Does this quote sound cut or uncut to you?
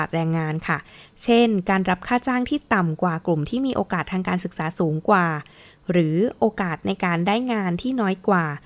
uncut